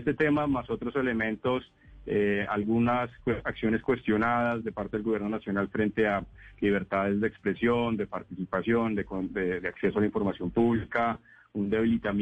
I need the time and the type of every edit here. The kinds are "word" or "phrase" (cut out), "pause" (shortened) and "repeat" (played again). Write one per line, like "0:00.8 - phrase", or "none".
none

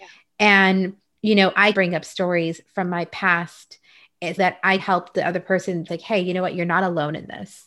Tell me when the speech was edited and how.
0:01.7 - word
0:04.4 - word
0:04.8 - word
0:05.9 - word

